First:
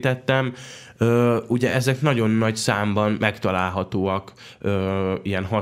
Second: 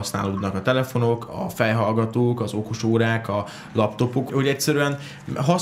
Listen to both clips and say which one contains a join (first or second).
second